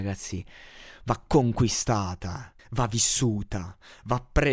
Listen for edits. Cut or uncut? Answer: cut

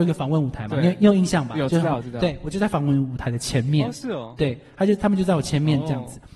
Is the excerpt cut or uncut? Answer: uncut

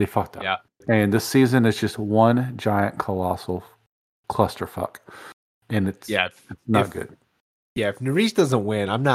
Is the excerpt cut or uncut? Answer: uncut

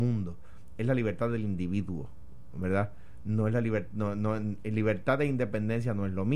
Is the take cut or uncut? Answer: uncut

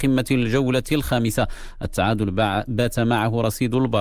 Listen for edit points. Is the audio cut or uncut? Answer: uncut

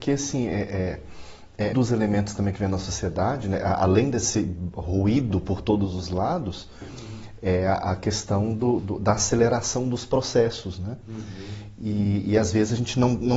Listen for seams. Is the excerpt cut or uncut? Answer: cut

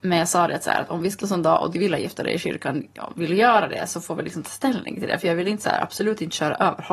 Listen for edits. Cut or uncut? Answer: cut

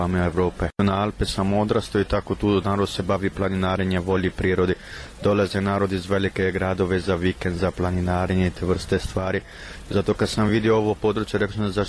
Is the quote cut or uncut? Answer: uncut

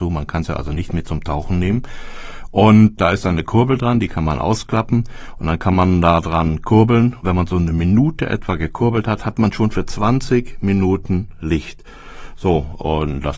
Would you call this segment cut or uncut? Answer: uncut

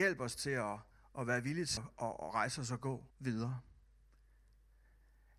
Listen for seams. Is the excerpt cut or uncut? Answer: cut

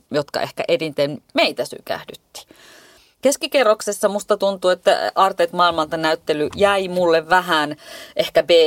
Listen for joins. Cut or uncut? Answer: uncut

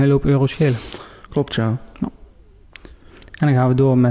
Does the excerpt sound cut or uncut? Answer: uncut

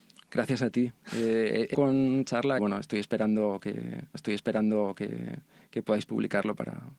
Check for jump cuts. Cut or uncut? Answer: cut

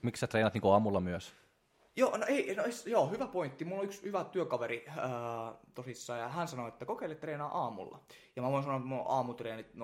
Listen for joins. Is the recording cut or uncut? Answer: uncut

